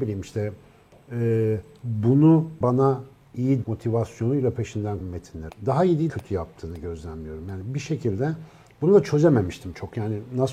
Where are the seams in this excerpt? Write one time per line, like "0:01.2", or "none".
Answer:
0:02.6
0:03.6
0:05.0
0:05.5
0:06.1